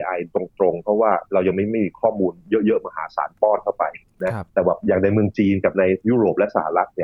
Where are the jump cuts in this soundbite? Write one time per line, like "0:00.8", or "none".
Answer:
0:04.5